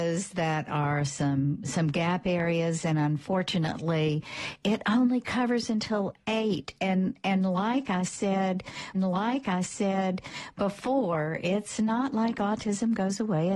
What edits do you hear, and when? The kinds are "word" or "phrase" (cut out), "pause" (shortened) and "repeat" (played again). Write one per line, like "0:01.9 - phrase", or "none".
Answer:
0:08.9 - repeat